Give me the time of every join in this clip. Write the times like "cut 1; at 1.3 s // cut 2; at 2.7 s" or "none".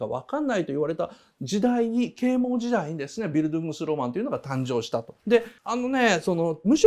cut 1; at 5.2 s